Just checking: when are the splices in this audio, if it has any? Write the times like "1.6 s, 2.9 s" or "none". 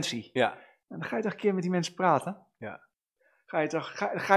none

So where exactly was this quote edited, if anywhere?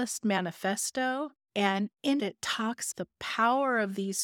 1.4 s, 2.2 s, 2.9 s

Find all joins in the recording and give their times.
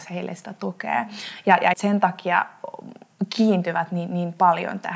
1.7 s

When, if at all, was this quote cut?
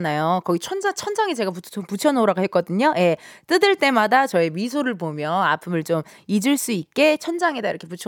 none

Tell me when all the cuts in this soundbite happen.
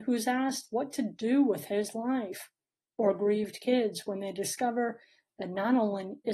none

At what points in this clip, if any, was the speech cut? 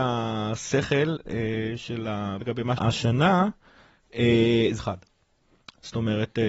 2.4 s, 2.8 s, 4.8 s

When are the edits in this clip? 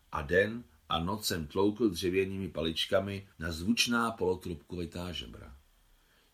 3.3 s

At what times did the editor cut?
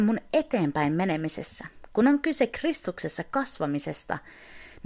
none

